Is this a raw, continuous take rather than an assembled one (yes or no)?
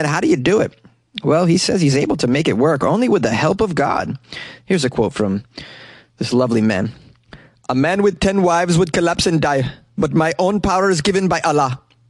yes